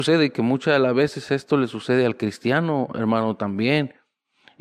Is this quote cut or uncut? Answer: uncut